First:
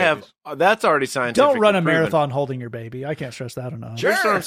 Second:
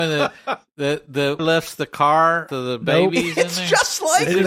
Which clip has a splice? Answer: second; 2 cuts; at 1.4 s, 2.5 s

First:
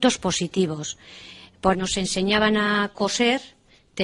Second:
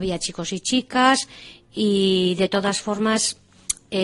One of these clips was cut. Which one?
first; 1 cut; at 1.7 s

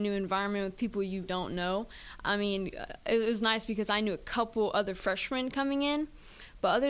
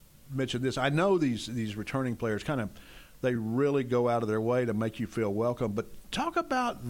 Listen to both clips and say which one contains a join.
first; 1 cut; at 1.2 s

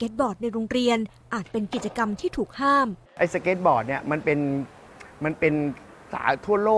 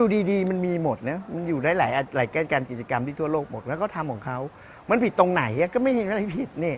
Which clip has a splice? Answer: first; 1 cut; at 3.1 s

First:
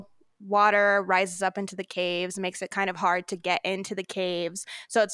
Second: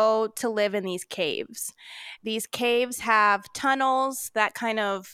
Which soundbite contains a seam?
second; 1 cut; at 2.2 s

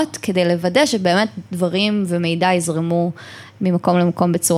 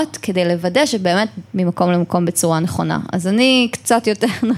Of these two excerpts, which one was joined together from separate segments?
second; 1 cut; at 1.5 s

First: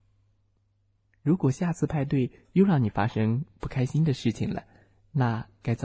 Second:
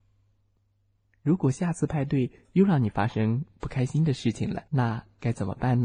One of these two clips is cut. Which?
second; 1 cut; at 4.7 s

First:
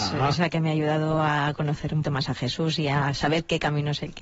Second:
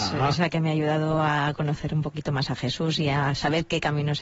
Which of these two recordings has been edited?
first; 1 cut; at 2.0 s

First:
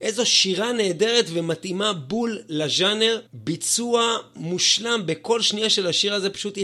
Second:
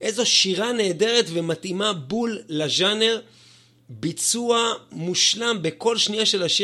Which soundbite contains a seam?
first; 1 cut; at 3.3 s

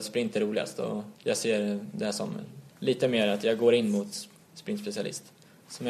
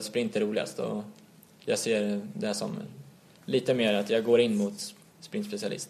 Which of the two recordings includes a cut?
first; 2 cuts; at 1.2 s, 2.7 s

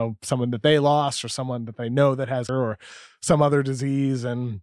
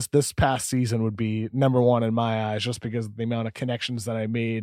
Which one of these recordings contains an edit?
first; 1 cut; at 2.5 s

